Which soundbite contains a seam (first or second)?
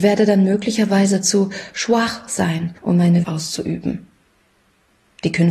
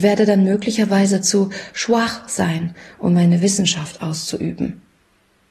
first